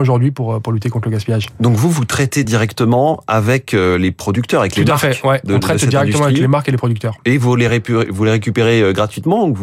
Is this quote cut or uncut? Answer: uncut